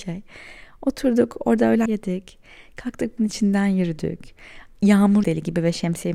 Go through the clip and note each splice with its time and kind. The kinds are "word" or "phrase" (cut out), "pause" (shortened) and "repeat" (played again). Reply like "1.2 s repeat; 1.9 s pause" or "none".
1.9 s word; 3.2 s word; 5.2 s word